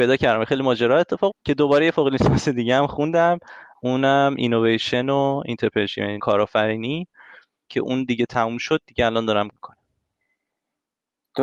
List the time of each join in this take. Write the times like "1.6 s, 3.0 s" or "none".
1.3 s, 6.2 s, 9.5 s